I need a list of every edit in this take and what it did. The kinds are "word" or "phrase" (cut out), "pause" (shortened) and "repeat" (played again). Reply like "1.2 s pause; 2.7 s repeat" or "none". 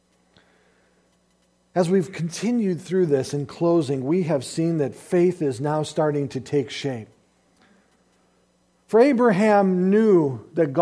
none